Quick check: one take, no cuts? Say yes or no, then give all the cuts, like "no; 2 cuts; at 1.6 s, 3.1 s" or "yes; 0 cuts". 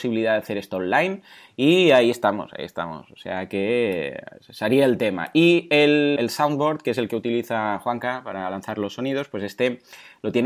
no; 1 cut; at 6.2 s